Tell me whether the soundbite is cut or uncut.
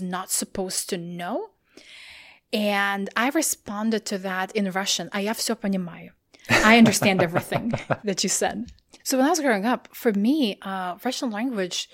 uncut